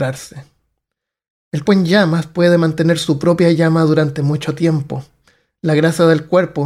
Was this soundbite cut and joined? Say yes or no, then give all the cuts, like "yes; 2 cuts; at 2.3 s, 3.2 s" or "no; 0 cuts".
yes; 1 cut; at 1.7 s